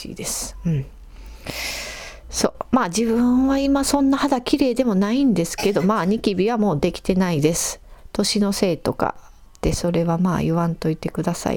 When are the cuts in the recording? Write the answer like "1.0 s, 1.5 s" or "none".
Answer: none

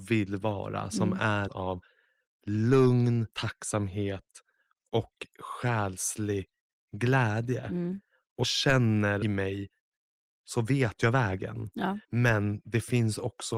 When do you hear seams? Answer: 1.5 s, 3.3 s, 8.4 s, 9.2 s, 12.0 s

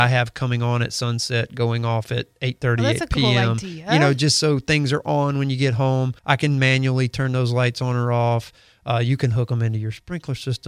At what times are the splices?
6.2 s

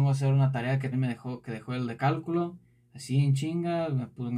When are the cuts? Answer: 0.9 s

